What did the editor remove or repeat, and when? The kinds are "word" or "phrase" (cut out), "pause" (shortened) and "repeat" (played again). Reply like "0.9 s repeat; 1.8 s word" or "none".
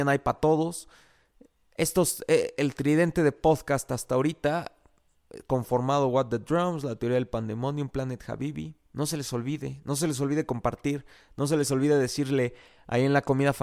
none